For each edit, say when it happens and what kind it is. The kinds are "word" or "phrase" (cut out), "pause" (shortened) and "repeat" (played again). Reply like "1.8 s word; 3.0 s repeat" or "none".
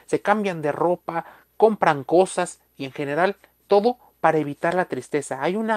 2.7 s pause